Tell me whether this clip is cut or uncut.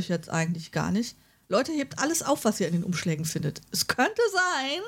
uncut